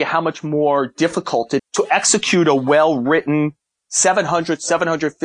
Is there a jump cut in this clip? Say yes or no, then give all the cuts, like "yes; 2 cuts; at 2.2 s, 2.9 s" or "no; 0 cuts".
yes; 1 cut; at 1.6 s